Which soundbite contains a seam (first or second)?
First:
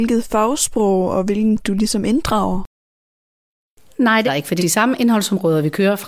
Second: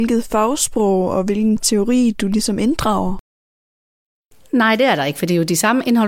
first